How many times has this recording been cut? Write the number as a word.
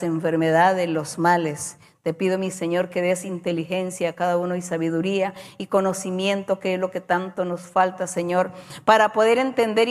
zero